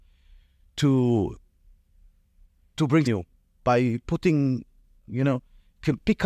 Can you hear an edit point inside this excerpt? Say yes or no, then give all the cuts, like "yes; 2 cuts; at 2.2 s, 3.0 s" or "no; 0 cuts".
yes; 2 cuts; at 3.1 s, 5.1 s